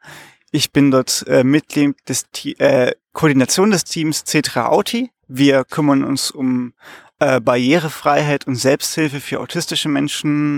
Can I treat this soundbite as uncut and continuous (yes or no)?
no